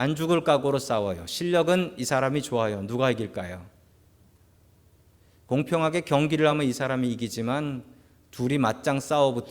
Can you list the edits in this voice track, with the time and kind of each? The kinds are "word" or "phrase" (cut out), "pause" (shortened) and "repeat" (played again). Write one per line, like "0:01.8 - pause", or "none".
none